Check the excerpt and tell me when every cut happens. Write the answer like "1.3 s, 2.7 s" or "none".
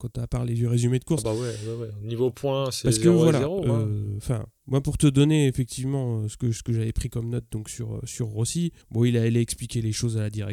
8.8 s